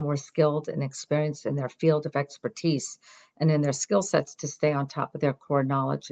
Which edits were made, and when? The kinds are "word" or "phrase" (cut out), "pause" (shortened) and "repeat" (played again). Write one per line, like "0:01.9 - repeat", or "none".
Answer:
none